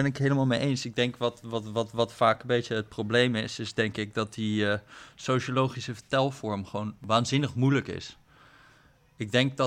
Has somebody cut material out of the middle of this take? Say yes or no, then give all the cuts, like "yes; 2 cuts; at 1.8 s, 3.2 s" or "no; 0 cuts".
no; 0 cuts